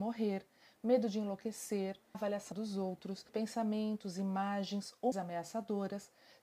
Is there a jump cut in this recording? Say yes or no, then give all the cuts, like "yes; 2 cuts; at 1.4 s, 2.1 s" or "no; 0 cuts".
yes; 4 cuts; at 2.1 s, 2.5 s, 3.3 s, 5.1 s